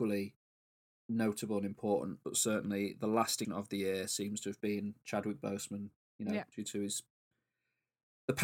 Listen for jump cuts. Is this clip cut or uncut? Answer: cut